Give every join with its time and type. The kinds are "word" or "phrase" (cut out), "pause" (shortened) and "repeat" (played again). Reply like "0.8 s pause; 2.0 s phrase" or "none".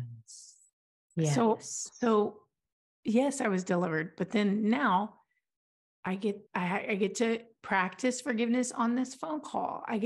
6.5 s pause